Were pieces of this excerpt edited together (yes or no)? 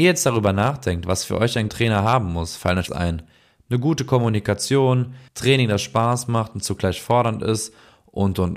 yes